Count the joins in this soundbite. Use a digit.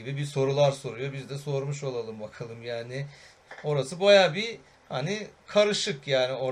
0